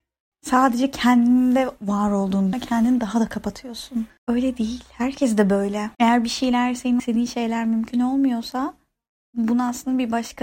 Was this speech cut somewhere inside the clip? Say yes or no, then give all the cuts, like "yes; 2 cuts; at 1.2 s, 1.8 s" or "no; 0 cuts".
yes; 4 cuts; at 2.5 s, 4.2 s, 5.9 s, 7.0 s